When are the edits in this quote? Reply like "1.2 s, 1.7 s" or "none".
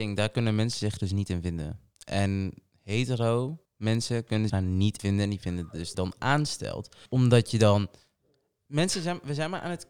3.6 s, 4.5 s, 5.0 s, 5.9 s, 7.1 s